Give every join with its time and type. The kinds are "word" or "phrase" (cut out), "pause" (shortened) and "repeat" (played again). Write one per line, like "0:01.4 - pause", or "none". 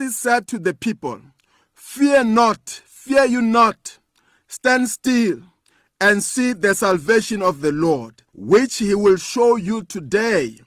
0:08.3 - pause

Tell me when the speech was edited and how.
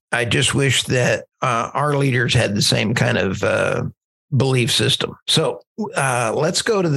none

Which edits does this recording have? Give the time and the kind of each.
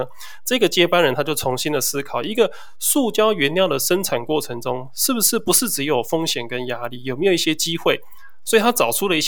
none

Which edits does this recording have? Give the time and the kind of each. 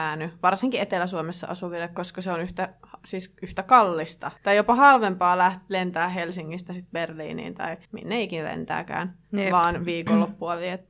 0:04.4 - pause
0:07.8 - pause
0:09.2 - pause

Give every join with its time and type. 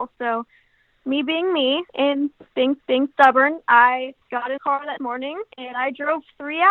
0:01.9 - pause
0:02.8 - repeat
0:04.2 - pause
0:04.6 - word
0:05.0 - word
0:05.5 - pause

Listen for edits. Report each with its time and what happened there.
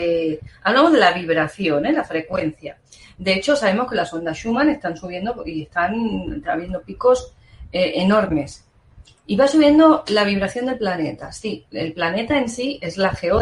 none

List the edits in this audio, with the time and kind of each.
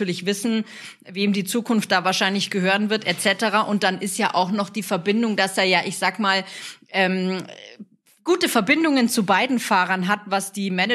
none

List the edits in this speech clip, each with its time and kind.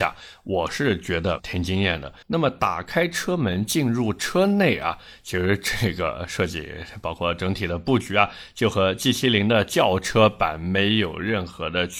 0:01.4 - word
0:02.2 - pause

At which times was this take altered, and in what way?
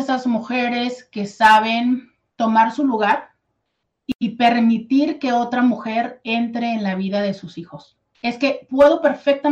0:02.3 - pause
0:08.1 - pause

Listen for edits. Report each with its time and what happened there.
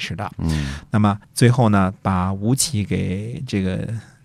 0:01.2 - pause

